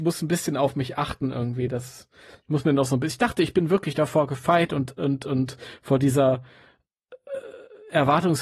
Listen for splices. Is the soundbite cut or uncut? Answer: uncut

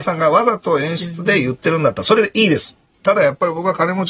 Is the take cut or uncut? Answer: uncut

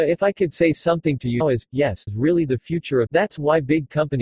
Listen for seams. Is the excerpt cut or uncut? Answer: cut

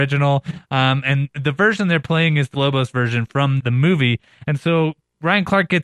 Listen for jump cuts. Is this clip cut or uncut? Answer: cut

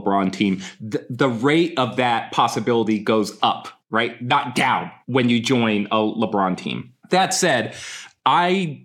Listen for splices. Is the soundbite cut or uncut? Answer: cut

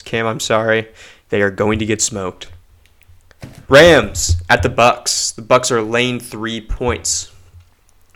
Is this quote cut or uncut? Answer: cut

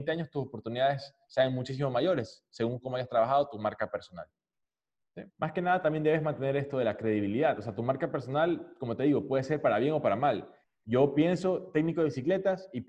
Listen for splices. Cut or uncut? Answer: cut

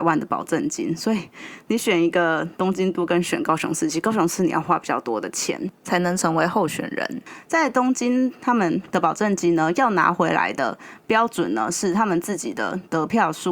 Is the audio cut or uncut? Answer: cut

